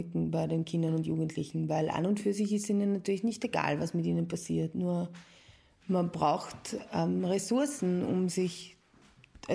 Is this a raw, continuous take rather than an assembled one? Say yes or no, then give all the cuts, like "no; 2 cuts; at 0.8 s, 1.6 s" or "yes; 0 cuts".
yes; 0 cuts